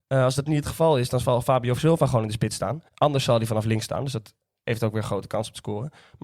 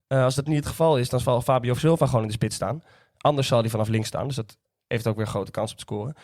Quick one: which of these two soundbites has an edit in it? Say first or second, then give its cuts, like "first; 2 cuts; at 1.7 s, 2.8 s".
first; 1 cut; at 2.9 s